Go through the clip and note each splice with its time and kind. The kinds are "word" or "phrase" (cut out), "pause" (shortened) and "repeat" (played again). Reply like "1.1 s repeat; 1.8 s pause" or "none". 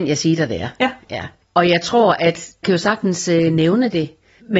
1.4 s pause; 2.6 s word